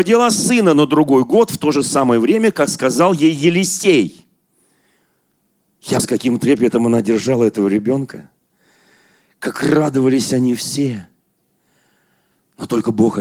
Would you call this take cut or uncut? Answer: cut